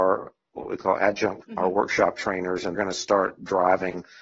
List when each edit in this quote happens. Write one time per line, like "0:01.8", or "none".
0:01.4
0:02.7